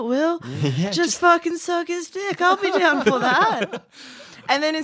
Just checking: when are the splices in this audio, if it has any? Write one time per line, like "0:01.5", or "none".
0:02.4